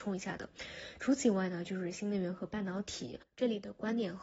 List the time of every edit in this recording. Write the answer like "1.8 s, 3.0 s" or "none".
3.3 s